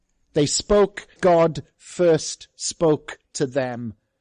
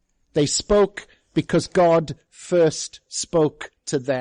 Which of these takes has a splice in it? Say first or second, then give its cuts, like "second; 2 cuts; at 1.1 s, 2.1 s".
first; 1 cut; at 1.2 s